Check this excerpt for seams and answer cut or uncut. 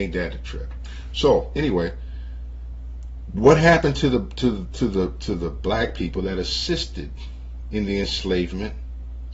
uncut